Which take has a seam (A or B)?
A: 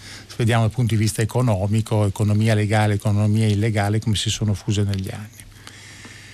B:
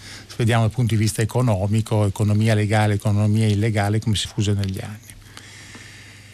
B